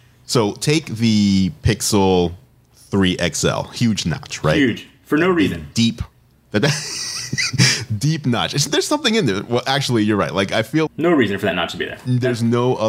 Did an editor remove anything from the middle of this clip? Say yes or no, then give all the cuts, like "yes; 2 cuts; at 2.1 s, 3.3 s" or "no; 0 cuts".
yes; 1 cut; at 10.9 s